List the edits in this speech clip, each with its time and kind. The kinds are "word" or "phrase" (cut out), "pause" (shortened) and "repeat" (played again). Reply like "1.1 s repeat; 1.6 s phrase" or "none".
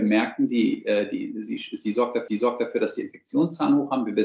2.3 s repeat